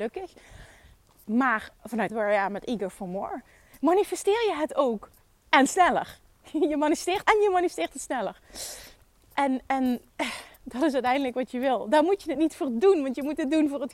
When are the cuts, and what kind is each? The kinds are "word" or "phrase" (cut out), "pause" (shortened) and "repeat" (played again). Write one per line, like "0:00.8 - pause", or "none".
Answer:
0:02.1 - phrase
0:07.2 - word
0:10.1 - pause